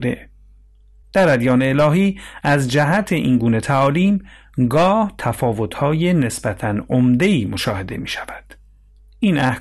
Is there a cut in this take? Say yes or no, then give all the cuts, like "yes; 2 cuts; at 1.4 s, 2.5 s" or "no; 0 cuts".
no; 0 cuts